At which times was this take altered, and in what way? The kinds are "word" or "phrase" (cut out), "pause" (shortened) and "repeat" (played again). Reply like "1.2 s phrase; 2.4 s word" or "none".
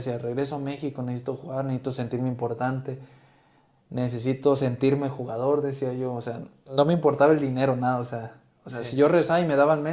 none